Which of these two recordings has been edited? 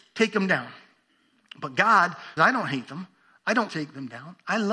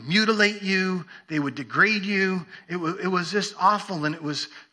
first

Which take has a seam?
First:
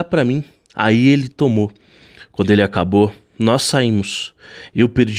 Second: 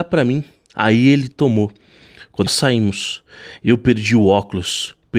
second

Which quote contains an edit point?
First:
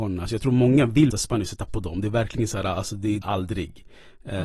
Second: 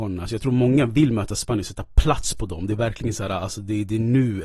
first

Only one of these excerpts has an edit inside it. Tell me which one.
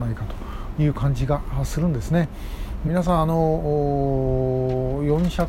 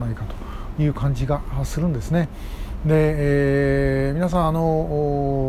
first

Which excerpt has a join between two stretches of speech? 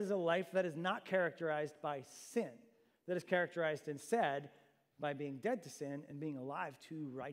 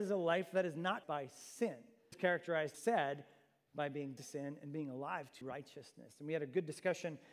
second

